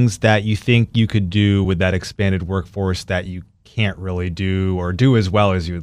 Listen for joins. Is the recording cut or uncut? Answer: uncut